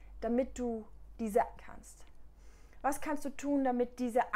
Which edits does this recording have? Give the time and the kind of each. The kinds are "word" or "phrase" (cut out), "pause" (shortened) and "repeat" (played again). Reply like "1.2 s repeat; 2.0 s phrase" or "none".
1.6 s phrase